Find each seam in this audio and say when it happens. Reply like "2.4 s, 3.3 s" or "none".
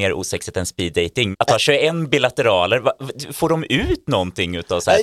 1.3 s